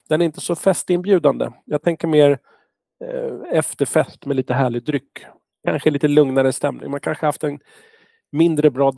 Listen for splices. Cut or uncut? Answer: uncut